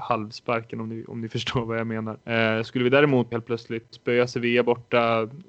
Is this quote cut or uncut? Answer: cut